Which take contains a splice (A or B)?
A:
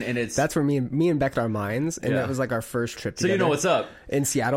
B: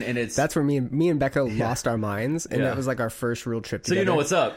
A